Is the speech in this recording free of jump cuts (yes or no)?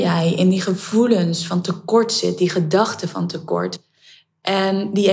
yes